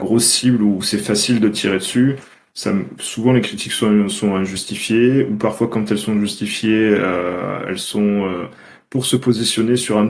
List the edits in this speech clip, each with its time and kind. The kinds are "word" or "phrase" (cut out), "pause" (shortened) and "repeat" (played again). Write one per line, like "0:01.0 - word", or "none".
none